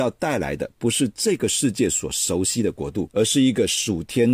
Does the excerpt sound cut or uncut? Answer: cut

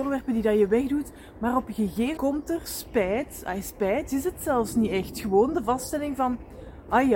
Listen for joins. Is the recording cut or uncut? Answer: cut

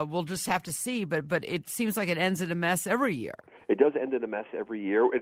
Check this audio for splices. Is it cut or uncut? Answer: uncut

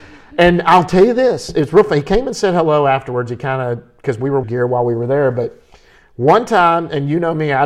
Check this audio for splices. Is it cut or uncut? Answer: cut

